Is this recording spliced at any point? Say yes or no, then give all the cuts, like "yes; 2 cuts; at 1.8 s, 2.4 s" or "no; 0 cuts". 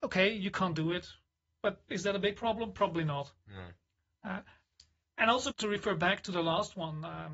yes; 1 cut; at 5.5 s